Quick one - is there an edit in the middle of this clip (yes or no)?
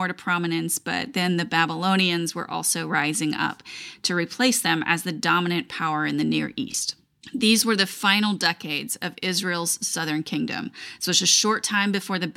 no